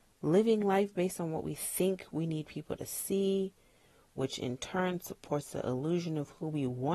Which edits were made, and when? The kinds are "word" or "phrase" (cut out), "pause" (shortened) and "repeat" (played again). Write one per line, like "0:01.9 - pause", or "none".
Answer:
none